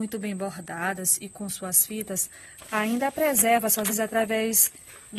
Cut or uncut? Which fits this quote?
cut